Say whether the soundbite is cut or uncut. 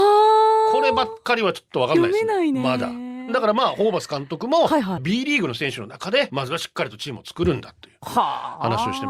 cut